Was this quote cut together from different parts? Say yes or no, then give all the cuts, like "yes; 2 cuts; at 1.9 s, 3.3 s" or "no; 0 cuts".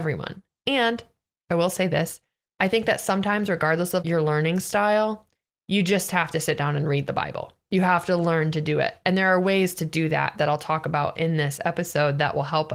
no; 0 cuts